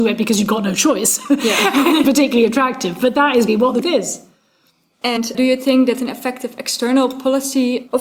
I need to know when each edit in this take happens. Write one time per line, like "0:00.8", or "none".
0:02.0
0:03.5
0:03.8
0:05.3